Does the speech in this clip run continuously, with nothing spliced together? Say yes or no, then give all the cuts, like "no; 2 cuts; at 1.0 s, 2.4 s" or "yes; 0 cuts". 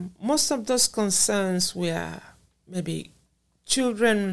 yes; 0 cuts